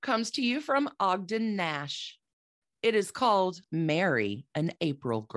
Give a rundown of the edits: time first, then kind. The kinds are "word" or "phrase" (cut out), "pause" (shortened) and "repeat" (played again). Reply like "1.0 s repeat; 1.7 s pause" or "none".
3.6 s word